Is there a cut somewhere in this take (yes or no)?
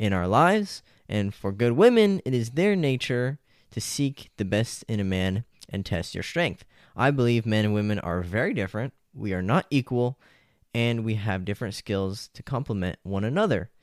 no